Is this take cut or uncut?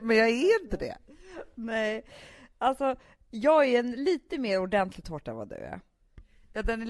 uncut